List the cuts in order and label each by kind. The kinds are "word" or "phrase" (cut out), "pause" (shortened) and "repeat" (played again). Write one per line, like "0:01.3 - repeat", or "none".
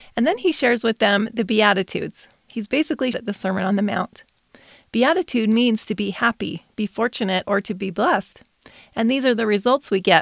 0:03.1 - phrase